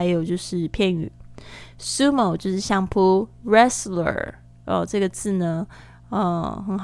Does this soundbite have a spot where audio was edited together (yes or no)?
no